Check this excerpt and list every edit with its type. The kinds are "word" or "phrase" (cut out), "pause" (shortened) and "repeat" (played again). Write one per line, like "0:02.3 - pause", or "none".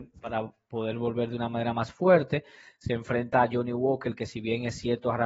none